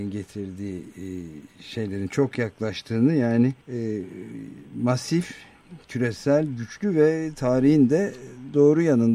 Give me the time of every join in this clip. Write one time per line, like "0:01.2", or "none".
0:03.6